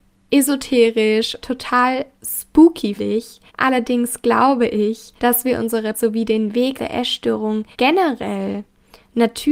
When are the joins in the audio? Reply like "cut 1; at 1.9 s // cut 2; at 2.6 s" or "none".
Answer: cut 1; at 1.4 s // cut 2; at 3.0 s // cut 3; at 3.5 s // cut 4; at 5.2 s // cut 5; at 5.9 s // cut 6; at 6.8 s // cut 7; at 7.7 s